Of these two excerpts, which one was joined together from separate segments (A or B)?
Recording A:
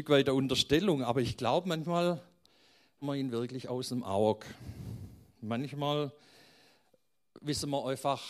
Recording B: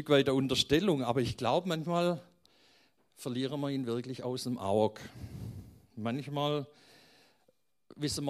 A